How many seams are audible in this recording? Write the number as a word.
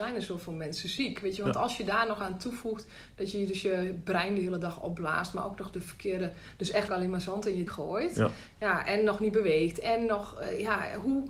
two